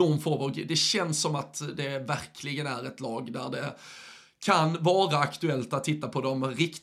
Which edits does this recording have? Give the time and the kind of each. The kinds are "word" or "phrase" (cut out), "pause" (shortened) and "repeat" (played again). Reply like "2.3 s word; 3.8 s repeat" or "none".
none